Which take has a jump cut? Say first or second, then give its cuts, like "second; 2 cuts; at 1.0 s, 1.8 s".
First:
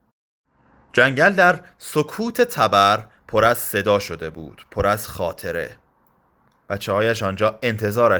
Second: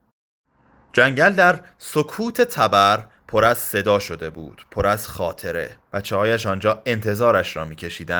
second; 1 cut; at 5.8 s